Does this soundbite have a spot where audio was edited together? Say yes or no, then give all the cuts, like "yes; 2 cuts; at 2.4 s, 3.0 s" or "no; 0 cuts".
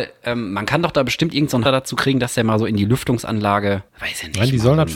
yes; 2 cuts; at 1.7 s, 3.9 s